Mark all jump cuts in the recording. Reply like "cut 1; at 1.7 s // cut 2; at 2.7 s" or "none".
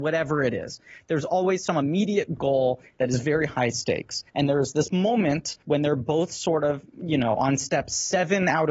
cut 1; at 4.3 s // cut 2; at 5.6 s